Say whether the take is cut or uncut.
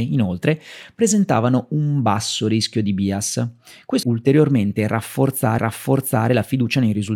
cut